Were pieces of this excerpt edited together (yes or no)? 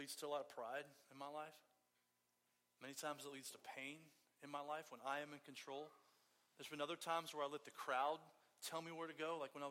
no